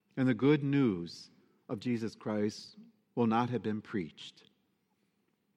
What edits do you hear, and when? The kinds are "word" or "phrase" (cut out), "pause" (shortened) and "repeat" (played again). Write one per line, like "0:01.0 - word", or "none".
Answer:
none